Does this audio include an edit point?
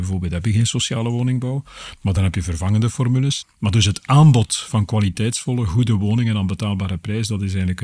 no; 0 cuts

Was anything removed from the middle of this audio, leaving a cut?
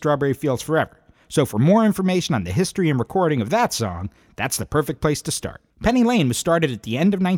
yes; 1 cut; at 5.7 s

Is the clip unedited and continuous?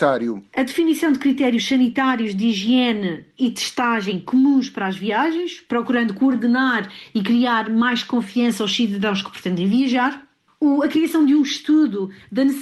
yes; 0 cuts

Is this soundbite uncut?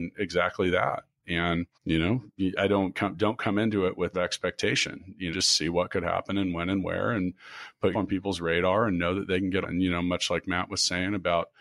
no; 7 cuts; at 1.7 s, 2.6 s, 2.9 s, 4.1 s, 5.3 s, 7.9 s, 9.6 s

